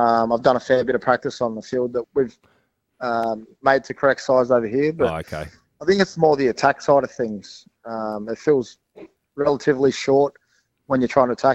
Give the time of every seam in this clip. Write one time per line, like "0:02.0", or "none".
0:02.0